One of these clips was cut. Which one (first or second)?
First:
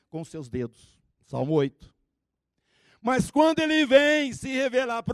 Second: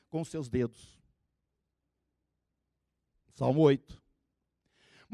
first